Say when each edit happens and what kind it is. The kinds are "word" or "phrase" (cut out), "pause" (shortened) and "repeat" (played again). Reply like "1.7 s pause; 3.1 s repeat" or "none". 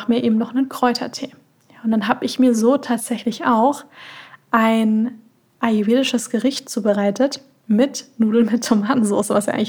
none